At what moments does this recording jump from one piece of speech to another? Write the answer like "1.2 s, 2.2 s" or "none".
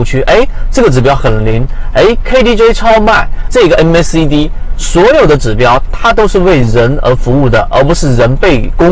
3.5 s